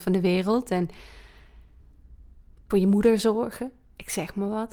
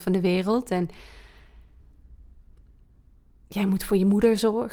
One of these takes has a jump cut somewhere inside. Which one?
first; 1 cut; at 2.7 s

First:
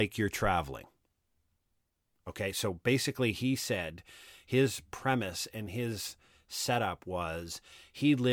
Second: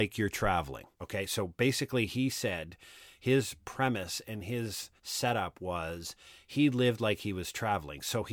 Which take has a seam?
second; 2 cuts; at 0.9 s, 5.0 s

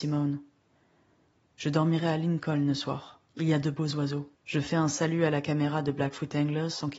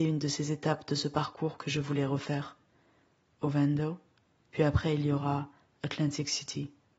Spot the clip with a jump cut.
first; 2 cuts; at 3.3 s, 4.3 s

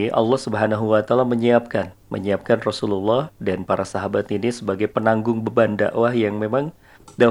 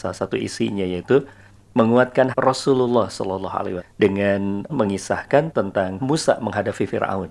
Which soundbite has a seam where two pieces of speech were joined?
second; 4 cuts; at 2.3 s, 3.8 s, 4.7 s, 6.0 s

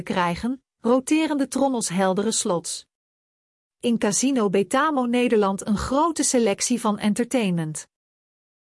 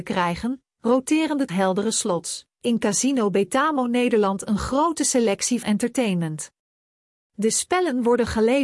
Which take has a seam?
second; 3 cuts; at 1.5 s, 2.5 s, 5.6 s

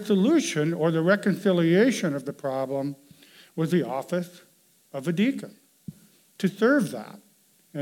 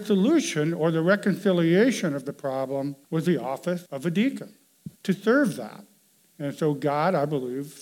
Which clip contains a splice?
second; 3 cuts; at 3.0 s, 3.9 s, 4.9 s

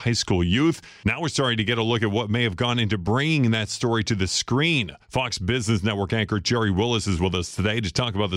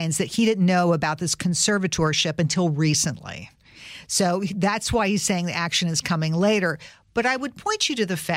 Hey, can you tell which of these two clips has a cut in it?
first; 1 cut; at 5.0 s

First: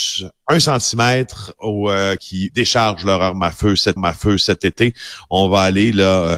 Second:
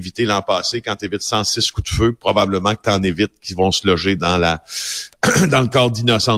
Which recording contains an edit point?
first; 3 cuts; at 2.2 s, 2.5 s, 4.0 s

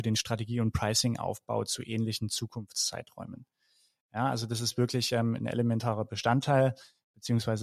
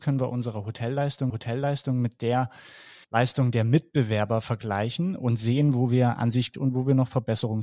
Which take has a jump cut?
second; 3 cuts; at 1.3 s, 3.0 s, 6.5 s

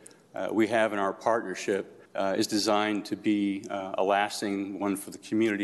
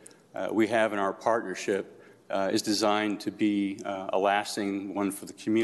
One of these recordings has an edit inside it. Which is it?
first; 1 cut; at 2.1 s

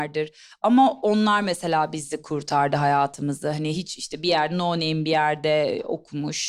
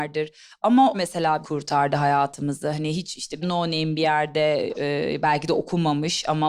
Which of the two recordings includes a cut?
second; 4 cuts; at 0.9 s, 1.4 s, 3.4 s, 4.7 s

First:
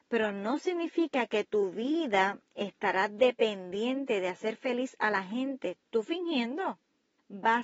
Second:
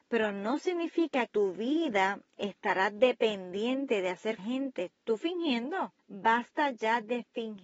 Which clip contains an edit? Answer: second; 3 cuts; at 1.3 s, 4.4 s, 6.0 s

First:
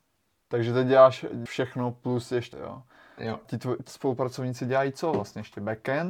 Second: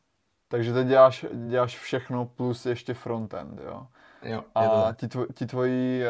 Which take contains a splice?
first; 4 cuts; at 1.5 s, 2.5 s, 3.4 s, 3.9 s

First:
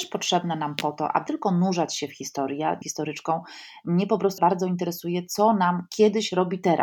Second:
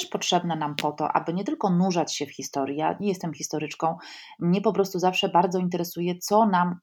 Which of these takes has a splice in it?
first; 3 cuts; at 1.3 s, 2.8 s, 4.4 s

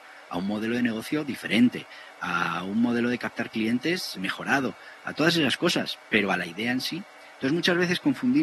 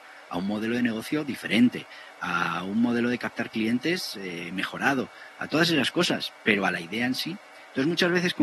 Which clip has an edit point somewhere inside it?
first; 1 cut; at 4.2 s

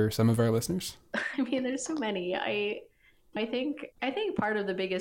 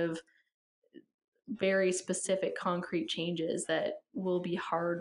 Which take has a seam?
first; 2 cuts; at 3.4 s, 3.9 s

